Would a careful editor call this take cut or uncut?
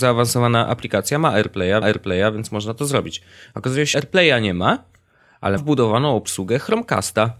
cut